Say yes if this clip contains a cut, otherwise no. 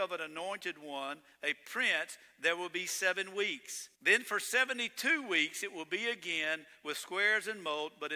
yes